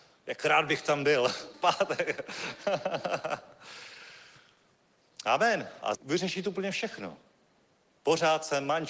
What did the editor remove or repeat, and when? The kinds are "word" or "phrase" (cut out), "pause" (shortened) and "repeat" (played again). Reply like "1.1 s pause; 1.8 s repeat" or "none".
1.5 s word; 5.9 s phrase